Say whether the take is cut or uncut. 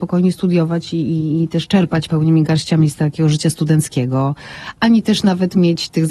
uncut